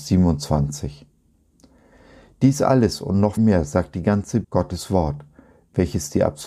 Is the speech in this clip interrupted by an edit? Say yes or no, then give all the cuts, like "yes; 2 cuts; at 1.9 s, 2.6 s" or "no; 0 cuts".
yes; 2 cuts; at 3.4 s, 4.4 s